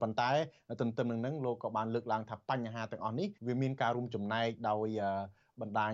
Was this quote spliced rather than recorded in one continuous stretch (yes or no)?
yes